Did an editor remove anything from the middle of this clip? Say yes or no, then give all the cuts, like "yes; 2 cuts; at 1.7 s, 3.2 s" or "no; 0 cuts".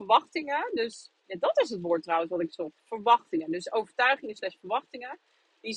no; 0 cuts